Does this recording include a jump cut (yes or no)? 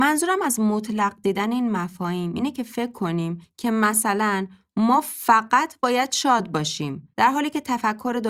yes